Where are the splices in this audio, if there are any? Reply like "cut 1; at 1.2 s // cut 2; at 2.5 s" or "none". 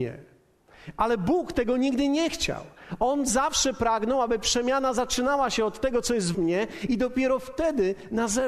cut 1; at 6.3 s